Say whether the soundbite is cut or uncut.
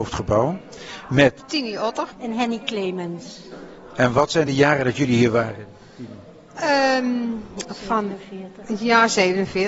uncut